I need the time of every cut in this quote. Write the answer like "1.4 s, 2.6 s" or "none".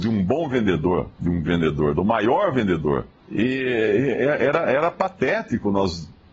1.1 s, 1.4 s, 3.2 s